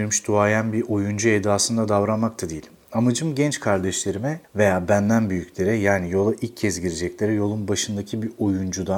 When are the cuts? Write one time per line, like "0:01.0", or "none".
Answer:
none